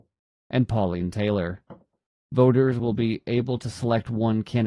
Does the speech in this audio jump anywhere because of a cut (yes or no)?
no